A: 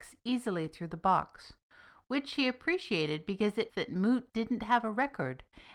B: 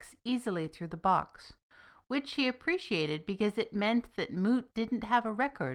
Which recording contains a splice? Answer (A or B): A